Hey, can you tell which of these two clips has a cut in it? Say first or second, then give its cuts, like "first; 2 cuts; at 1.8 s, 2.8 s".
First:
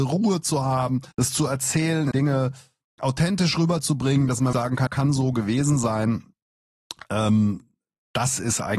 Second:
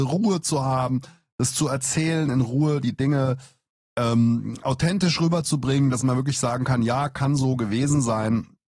first; 5 cuts; at 1.1 s, 2.1 s, 3.0 s, 4.5 s, 4.9 s